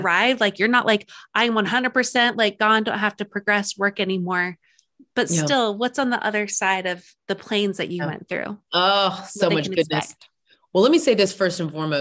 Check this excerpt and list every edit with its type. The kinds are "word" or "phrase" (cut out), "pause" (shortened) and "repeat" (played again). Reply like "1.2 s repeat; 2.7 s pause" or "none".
none